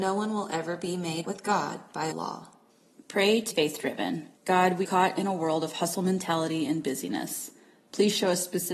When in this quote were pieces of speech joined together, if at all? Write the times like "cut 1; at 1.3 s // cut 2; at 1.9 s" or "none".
cut 1; at 1.2 s // cut 2; at 2.1 s // cut 3; at 2.7 s // cut 4; at 3.5 s // cut 5; at 4.4 s // cut 6; at 4.8 s